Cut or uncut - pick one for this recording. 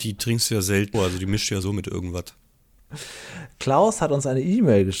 cut